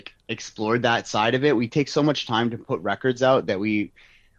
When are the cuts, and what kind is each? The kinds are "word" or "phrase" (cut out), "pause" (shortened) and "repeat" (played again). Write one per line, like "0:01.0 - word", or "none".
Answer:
none

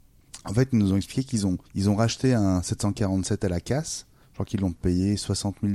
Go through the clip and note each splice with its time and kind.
0:01.7 - pause
0:04.2 - pause

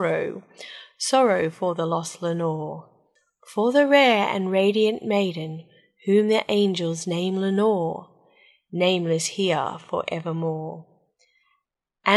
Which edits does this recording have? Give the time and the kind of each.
none

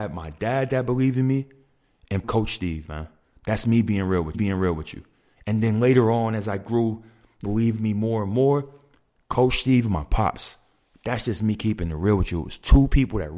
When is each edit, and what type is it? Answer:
0:02.2 - word
0:04.3 - repeat
0:07.4 - phrase

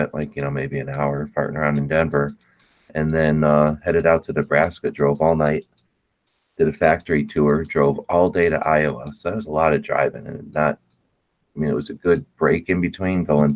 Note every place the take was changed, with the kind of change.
none

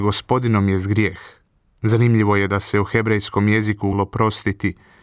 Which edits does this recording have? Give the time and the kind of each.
0:03.9 - word

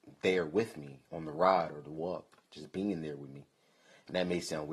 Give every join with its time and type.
0:01.1 - pause

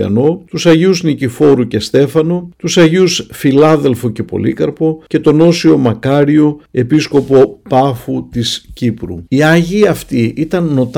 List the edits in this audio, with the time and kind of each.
none

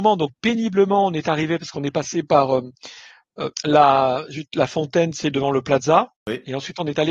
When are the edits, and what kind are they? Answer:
0:03.5 - pause
0:06.2 - pause

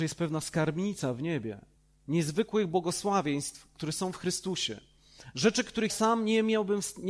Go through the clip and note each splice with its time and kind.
0:01.8 - pause
0:05.9 - word

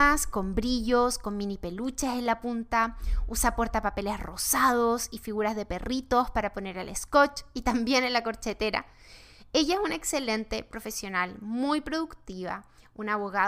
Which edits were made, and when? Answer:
none

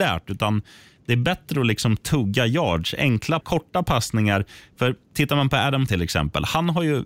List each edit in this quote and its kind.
0:03.4 - word
0:05.9 - word

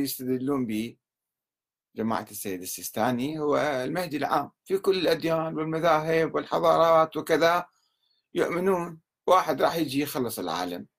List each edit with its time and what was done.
none

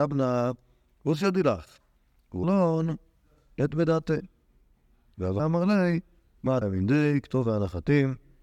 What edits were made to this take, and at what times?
0:02.4 - word
0:05.4 - word
0:06.6 - word

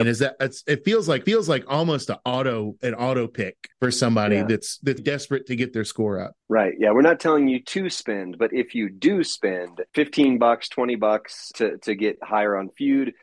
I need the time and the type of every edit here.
0:01.2 - repeat
0:03.7 - pause
0:05.0 - word
0:06.4 - pause
0:09.9 - pause
0:11.5 - word

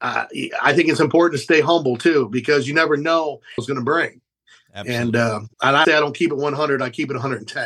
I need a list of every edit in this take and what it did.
0:03.6 - phrase
0:05.5 - pause
0:05.8 - word

